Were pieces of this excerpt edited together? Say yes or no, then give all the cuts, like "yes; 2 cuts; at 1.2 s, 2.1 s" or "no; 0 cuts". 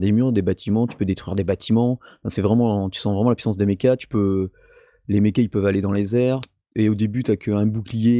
no; 0 cuts